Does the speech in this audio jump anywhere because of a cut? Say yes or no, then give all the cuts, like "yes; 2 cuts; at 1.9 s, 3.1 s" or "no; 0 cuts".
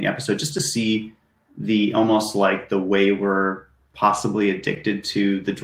no; 0 cuts